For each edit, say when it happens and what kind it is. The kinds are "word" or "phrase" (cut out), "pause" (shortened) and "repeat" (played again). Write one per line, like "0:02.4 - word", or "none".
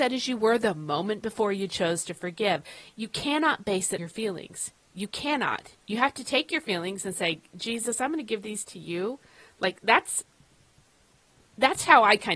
0:04.0 - word
0:05.7 - pause